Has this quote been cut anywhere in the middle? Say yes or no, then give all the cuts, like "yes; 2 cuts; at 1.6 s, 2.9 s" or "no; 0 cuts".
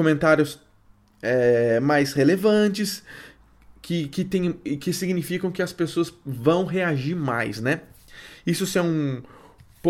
no; 0 cuts